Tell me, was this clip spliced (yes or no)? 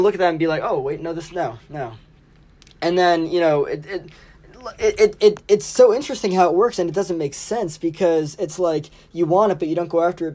no